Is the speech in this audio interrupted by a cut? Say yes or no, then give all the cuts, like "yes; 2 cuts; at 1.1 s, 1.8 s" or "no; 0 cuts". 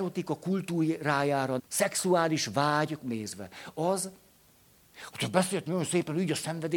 yes; 3 cuts; at 1.6 s, 3.0 s, 5.1 s